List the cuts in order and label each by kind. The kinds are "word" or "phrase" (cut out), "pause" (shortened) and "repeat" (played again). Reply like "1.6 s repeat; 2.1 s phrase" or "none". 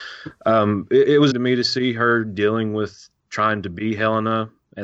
1.3 s word